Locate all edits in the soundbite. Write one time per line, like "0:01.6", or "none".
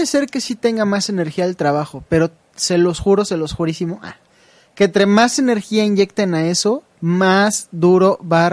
0:06.9